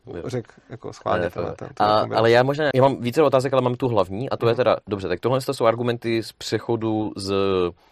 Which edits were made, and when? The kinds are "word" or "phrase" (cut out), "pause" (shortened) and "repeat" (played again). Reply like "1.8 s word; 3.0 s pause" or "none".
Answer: 2.7 s word